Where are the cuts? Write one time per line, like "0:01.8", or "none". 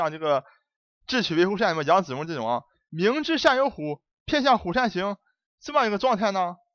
none

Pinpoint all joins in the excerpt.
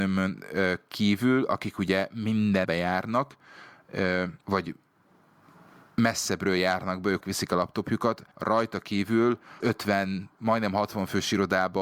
0:02.6
0:04.4
0:07.2
0:08.3
0:09.6

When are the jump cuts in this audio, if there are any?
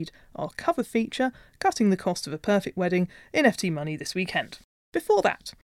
none

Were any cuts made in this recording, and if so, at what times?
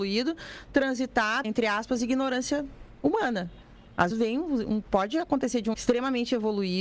0:01.4
0:04.1
0:05.7

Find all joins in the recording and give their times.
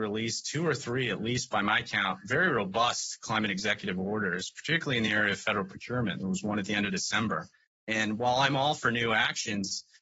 none

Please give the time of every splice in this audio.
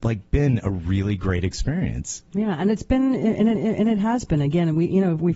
0:02.3
0:03.6

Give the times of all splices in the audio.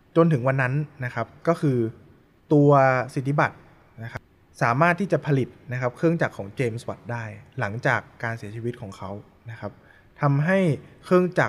none

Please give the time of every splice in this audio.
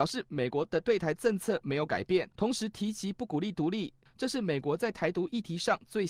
0:02.3

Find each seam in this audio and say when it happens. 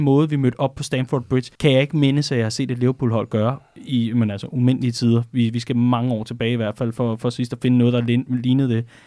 0:01.5

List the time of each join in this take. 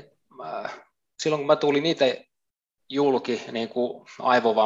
none

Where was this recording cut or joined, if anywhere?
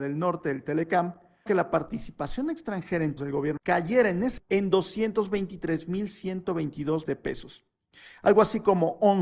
0:01.5
0:03.2
0:03.6
0:04.4
0:07.1

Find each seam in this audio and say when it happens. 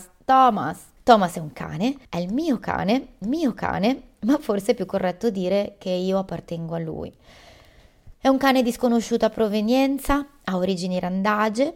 0:01.0
0:02.0
0:03.2

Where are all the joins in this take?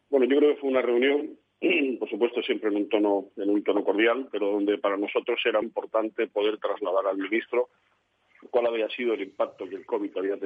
0:05.6

